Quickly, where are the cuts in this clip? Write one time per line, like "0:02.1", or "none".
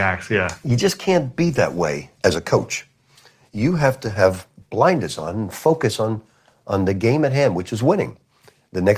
none